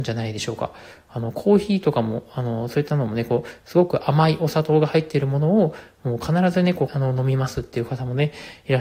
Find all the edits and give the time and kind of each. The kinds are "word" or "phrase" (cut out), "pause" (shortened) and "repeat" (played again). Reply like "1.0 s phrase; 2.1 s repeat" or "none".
6.9 s phrase